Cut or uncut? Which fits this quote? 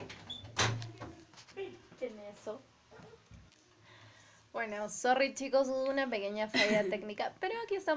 uncut